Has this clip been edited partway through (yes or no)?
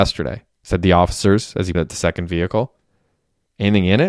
yes